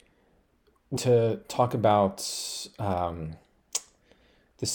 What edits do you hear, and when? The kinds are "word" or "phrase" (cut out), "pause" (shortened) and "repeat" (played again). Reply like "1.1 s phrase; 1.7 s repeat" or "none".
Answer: 1.0 s word